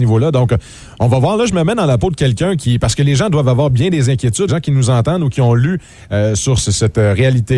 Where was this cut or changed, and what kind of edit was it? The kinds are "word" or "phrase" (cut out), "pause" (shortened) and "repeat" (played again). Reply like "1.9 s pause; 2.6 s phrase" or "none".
4.5 s phrase; 6.6 s phrase